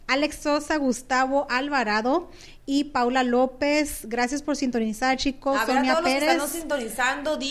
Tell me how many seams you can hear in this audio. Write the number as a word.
zero